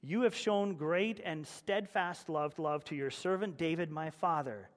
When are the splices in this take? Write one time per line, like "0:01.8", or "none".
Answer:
0:02.5